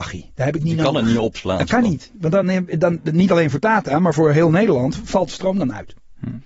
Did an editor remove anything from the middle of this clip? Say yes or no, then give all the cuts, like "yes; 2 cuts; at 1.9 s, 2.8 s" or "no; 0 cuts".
no; 0 cuts